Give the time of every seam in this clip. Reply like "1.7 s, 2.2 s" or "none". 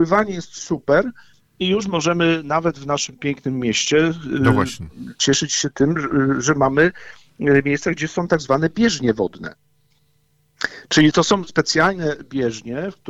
none